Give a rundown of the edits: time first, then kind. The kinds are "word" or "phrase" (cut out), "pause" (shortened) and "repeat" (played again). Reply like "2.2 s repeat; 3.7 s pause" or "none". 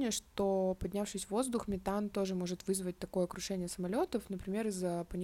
none